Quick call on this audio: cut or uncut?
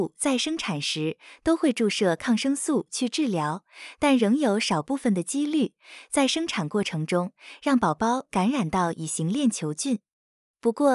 uncut